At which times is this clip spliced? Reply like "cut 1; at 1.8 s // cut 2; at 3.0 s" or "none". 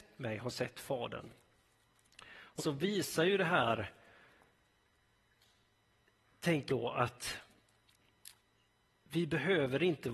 cut 1; at 2.6 s // cut 2; at 6.7 s